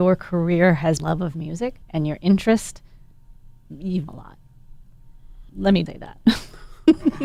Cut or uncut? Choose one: cut